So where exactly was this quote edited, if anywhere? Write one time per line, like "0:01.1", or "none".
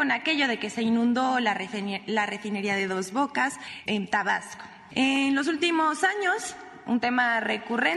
0:03.9